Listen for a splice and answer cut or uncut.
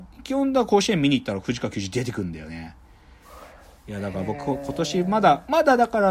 uncut